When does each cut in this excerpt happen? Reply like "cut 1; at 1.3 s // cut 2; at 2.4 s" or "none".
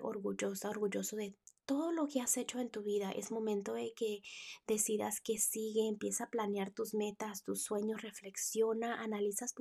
none